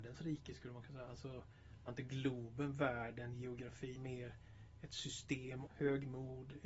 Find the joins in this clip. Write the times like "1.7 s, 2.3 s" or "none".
1.9 s, 4.0 s, 5.7 s

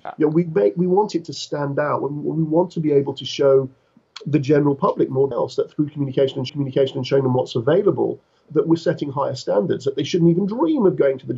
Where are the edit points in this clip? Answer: 5.3 s, 6.5 s, 8.5 s

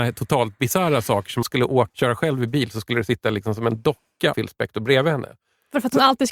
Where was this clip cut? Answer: 1.4 s, 1.9 s, 4.3 s

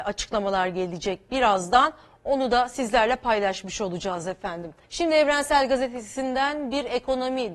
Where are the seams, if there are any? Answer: 4.8 s

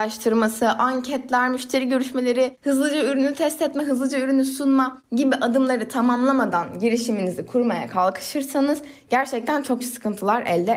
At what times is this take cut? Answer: 9.8 s

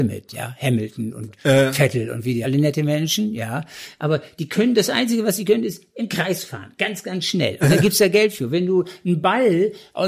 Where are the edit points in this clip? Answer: 2.4 s

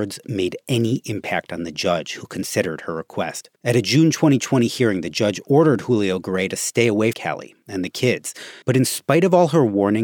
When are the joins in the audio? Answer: 3.6 s, 7.1 s, 8.6 s

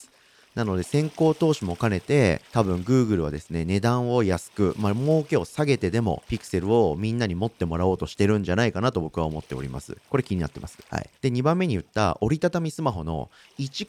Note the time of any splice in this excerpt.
2.4 s, 6.2 s, 10.0 s, 10.8 s, 11.1 s

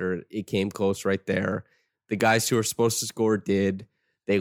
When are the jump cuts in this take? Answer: none

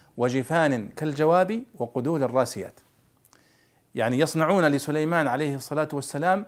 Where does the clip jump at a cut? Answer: none

